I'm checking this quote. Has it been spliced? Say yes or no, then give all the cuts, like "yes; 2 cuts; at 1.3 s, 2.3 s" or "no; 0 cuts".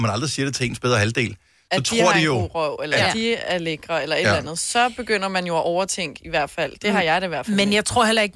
no; 0 cuts